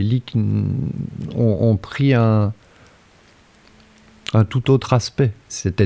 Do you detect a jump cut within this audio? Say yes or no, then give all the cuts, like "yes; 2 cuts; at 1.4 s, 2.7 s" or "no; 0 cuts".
no; 0 cuts